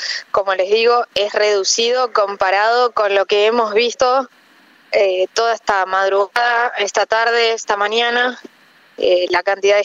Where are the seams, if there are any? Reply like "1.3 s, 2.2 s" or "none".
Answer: none